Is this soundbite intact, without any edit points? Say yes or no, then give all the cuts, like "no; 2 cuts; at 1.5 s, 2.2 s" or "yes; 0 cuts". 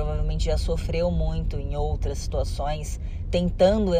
yes; 0 cuts